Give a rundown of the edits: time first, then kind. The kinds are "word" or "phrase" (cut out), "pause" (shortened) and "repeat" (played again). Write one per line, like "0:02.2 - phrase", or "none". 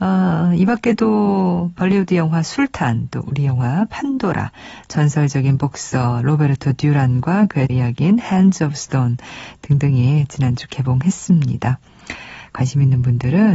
0:07.7 - word